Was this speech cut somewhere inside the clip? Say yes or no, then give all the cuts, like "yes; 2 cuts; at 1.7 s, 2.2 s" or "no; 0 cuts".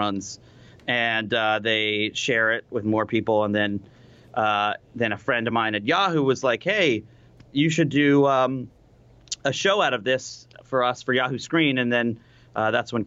no; 0 cuts